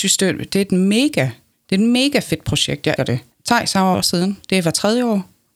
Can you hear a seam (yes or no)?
yes